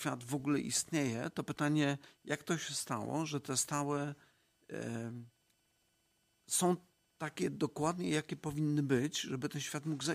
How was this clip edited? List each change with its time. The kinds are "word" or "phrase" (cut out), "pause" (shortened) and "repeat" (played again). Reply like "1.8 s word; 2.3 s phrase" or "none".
none